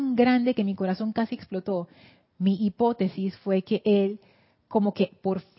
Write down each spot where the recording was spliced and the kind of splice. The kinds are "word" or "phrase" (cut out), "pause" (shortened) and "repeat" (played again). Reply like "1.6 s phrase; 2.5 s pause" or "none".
none